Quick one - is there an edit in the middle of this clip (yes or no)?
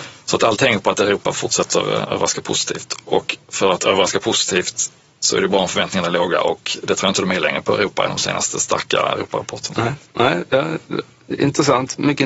yes